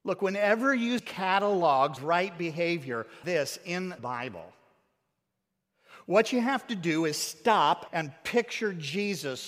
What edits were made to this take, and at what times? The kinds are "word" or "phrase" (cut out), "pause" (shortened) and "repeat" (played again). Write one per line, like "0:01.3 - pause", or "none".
0:01.0 - word
0:02.0 - word
0:03.2 - word
0:04.0 - word
0:07.9 - word